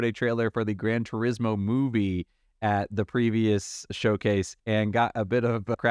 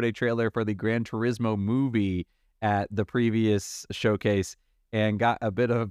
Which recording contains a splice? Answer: first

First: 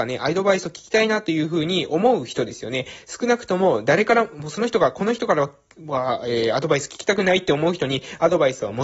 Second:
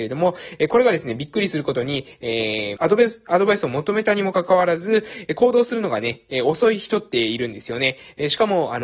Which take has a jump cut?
second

